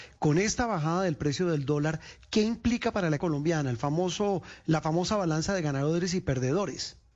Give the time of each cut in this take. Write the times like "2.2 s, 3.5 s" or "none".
3.2 s